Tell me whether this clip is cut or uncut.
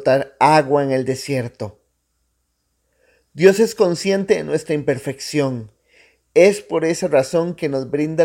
uncut